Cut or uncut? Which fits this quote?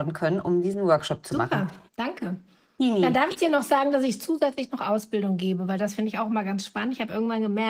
cut